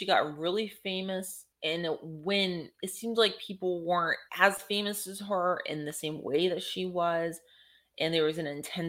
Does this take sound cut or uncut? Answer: cut